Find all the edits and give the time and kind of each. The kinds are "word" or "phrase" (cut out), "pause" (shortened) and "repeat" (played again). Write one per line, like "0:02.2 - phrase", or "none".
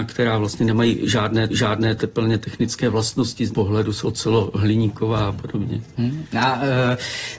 0:01.5 - repeat
0:03.5 - word
0:04.0 - word

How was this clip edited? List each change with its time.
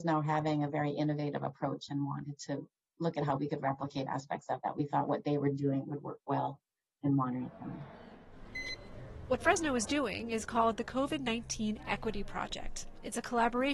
none

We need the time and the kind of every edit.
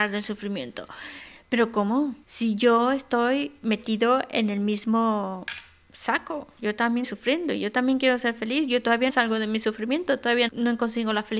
0:02.2 - pause
0:07.0 - word
0:09.1 - word
0:10.5 - word

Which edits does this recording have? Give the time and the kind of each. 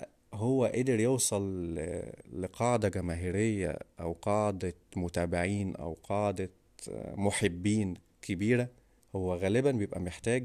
0:09.0 - pause

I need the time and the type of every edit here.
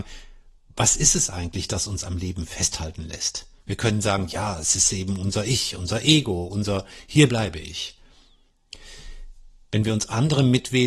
0:03.6 - pause
0:07.3 - phrase

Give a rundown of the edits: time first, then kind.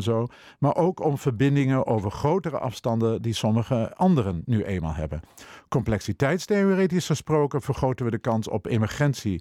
none

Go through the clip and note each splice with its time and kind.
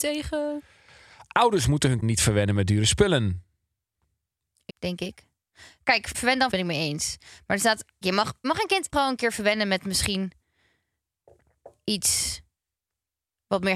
0:02.0 - word
0:04.7 - word
0:06.1 - word
0:06.5 - word
0:08.0 - word
0:08.4 - word
0:08.9 - word

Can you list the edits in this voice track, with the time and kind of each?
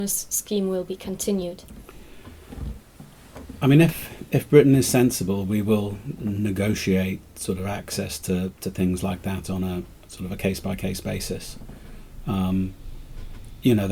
none

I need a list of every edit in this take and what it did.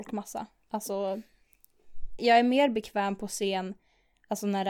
0:02.2 - word

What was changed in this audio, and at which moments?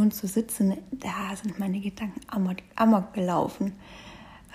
none

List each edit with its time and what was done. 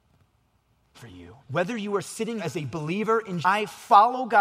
0:01.0 - word
0:01.4 - pause
0:02.4 - word
0:03.4 - phrase

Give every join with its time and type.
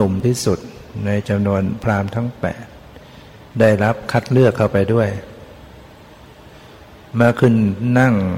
0:03.5 - pause

